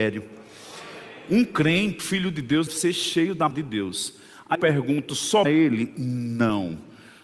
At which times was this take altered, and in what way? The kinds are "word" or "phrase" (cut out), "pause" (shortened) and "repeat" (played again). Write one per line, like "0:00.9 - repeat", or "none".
0:02.0 - word
0:02.7 - word
0:03.5 - word
0:04.5 - word
0:05.4 - word